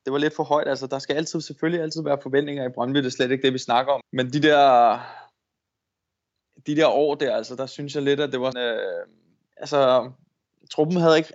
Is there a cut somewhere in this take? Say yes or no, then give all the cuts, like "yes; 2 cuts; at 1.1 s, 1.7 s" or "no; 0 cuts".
yes; 2 cuts; at 4.0 s, 8.5 s